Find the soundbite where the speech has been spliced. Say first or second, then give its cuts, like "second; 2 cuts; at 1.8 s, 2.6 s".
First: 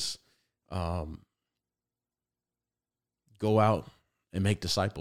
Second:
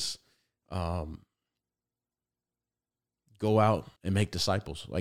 second; 1 cut; at 4.0 s